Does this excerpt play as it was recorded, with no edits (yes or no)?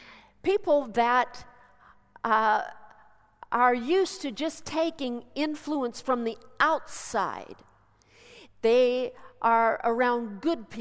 yes